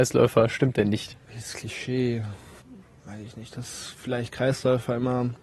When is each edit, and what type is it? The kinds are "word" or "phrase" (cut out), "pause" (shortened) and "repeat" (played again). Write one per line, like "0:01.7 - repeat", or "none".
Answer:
0:01.2 - pause
0:02.6 - pause